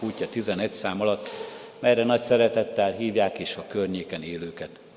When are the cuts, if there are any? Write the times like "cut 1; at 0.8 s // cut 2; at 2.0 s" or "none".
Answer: cut 1; at 3.6 s